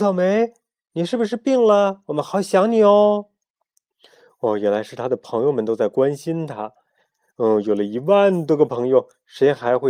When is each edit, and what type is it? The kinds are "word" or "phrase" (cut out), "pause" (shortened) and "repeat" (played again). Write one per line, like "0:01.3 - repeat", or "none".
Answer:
none